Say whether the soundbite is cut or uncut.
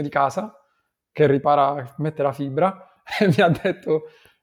uncut